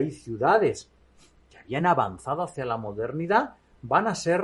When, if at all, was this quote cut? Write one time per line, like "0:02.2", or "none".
none